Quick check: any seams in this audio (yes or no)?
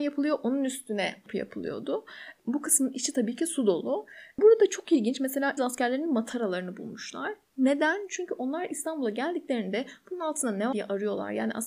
yes